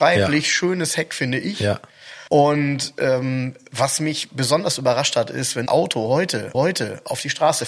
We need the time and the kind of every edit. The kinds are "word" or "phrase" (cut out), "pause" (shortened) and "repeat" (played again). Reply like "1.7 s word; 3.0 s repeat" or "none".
2.3 s pause; 5.7 s phrase; 6.5 s repeat

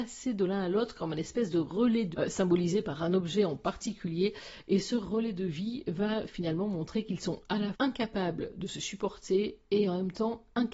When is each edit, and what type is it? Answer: 2.1 s word; 7.7 s word

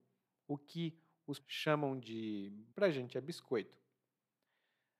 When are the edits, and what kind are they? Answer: 1.4 s word; 2.7 s word

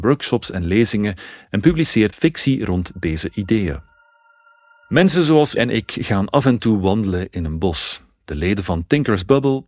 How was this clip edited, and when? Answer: 2.1 s word; 5.6 s word

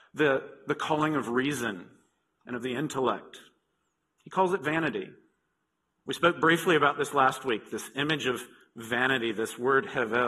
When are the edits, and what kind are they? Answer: none

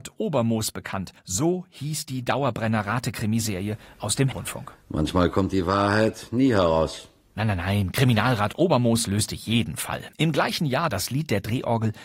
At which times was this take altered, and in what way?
1.2 s pause; 4.3 s word; 10.1 s pause; 10.9 s phrase

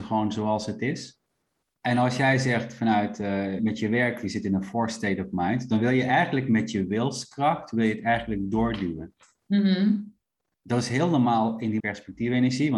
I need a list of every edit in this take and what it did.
1.6 s pause; 3.6 s word; 11.8 s word

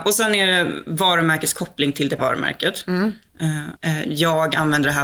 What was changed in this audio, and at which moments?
2.2 s word; 3.8 s word

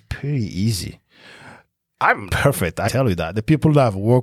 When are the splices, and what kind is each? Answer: 2.3 s word; 2.9 s word

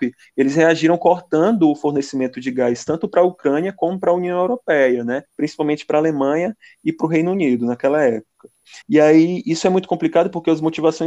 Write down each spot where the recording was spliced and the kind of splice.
5.2 s pause; 8.8 s pause

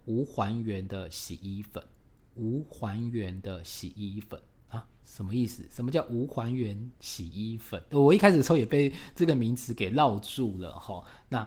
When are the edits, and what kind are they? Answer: 7.0 s pause

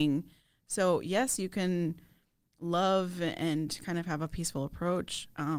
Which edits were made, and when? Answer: none

